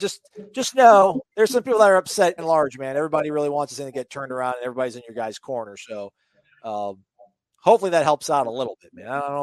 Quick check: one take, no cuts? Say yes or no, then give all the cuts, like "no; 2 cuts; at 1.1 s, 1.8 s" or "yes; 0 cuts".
no; 1 cut; at 2.4 s